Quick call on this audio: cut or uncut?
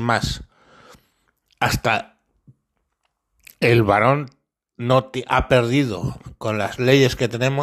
uncut